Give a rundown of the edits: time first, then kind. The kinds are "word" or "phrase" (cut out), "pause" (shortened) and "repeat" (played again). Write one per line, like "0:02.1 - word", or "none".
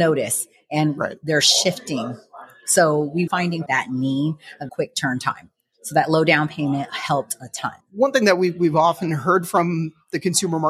0:03.3 - word
0:03.7 - phrase
0:04.7 - word